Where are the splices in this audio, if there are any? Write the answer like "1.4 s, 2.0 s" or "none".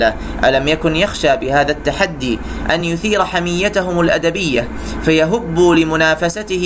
none